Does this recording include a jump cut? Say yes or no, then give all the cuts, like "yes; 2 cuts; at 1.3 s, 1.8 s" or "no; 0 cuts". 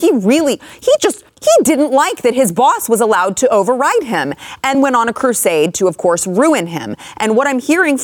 yes; 2 cuts; at 1.3 s, 4.7 s